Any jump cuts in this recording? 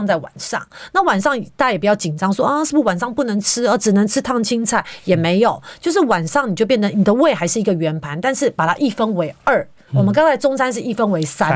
no; 0 cuts

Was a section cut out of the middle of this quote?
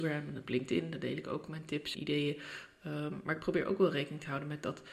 yes; 1 cut; at 1.9 s

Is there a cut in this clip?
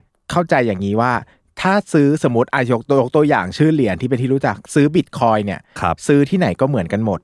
no; 0 cuts

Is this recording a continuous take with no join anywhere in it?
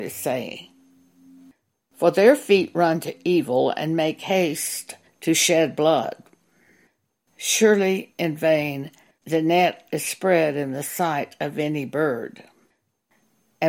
yes; 0 cuts

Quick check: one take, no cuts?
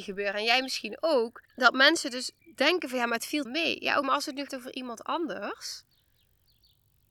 no; 5 cuts; at 1.4 s, 2.4 s, 3.5 s, 4.0 s, 4.5 s

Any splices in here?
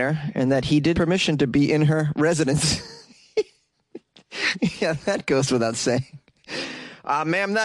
yes; 1 cut; at 0.9 s

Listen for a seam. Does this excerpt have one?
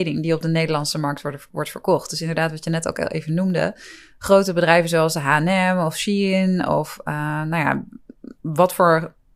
no; 0 cuts

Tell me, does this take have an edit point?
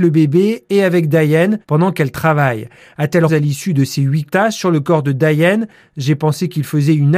yes; 3 cuts; at 1.6 s, 3.3 s, 4.3 s

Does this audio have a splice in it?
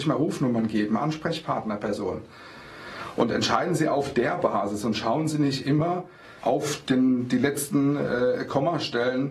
yes; 1 cut; at 6.4 s

